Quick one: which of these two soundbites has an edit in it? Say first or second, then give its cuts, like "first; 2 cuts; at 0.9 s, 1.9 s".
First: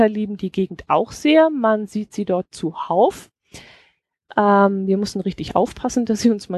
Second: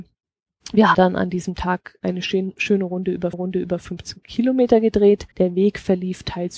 second; 3 cuts; at 0.9 s, 3.3 s, 5.3 s